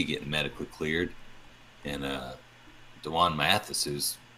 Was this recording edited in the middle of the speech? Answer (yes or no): no